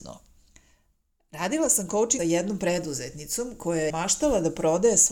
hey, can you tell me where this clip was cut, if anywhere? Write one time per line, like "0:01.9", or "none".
0:02.2
0:03.9